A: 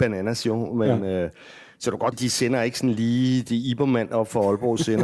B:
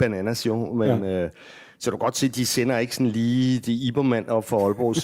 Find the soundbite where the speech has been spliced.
A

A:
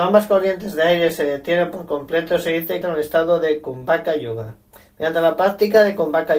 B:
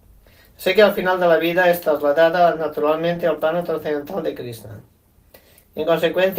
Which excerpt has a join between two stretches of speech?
A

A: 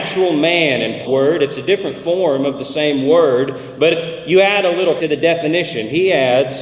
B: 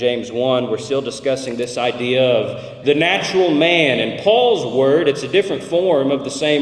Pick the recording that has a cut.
A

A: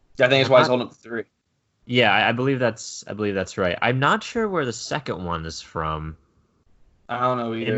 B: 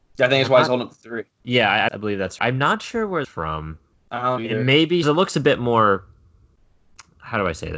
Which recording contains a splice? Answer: B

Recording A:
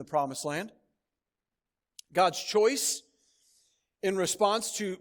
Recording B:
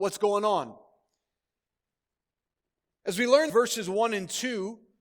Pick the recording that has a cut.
B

